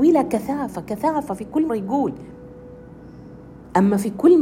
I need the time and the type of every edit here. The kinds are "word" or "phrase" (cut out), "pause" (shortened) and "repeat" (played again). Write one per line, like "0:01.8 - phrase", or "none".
0:01.7 - word